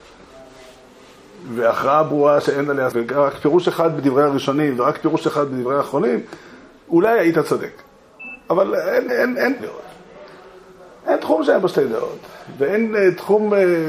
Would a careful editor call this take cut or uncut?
cut